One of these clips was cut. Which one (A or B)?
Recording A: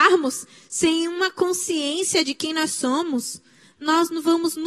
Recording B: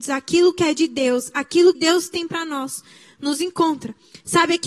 B